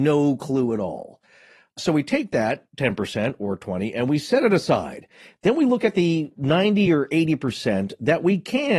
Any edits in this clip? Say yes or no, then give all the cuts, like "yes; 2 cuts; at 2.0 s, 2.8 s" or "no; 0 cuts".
no; 0 cuts